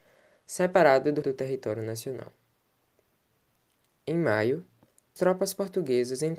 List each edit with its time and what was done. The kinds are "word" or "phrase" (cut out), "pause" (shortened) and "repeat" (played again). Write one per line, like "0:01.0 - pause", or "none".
0:01.2 - word
0:05.2 - word